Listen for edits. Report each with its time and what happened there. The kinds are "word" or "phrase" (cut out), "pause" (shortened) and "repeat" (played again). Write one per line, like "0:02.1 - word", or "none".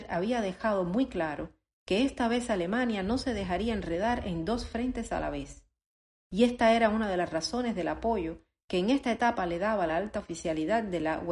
none